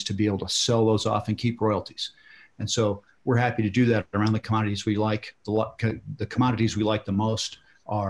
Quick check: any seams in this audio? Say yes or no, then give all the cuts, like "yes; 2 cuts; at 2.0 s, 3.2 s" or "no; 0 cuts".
no; 0 cuts